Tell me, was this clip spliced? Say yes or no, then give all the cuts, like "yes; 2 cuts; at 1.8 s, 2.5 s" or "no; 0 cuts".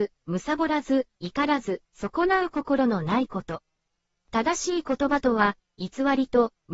no; 0 cuts